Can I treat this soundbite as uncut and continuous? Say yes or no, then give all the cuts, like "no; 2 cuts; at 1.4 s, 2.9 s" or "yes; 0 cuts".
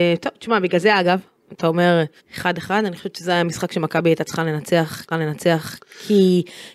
no; 3 cuts; at 1.4 s, 2.2 s, 5.1 s